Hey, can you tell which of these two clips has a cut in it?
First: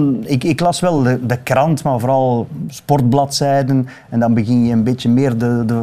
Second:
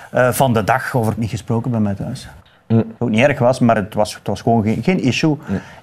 second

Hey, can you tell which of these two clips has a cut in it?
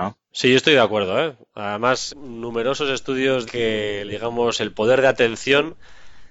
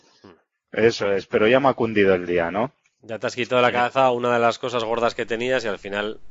first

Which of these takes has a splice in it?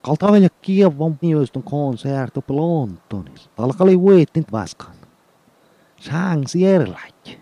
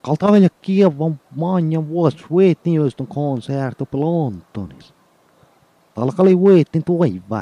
first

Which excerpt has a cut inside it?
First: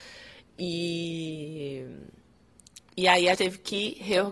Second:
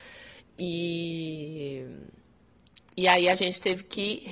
first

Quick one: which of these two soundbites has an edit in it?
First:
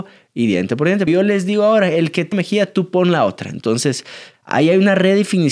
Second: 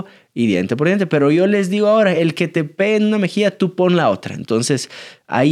first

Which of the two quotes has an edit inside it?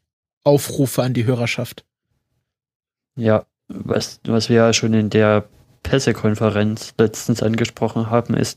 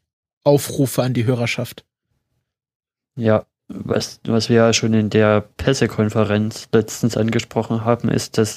second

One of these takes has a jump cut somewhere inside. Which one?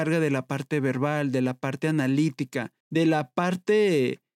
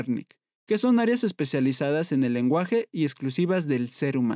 first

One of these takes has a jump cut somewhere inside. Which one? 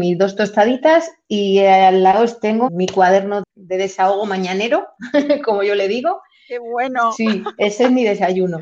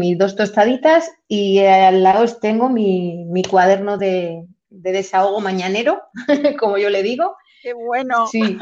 first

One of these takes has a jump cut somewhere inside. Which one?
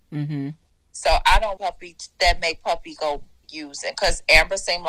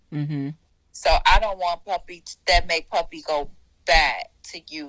first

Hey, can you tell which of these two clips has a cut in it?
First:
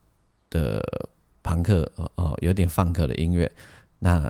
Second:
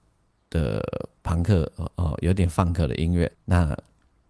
second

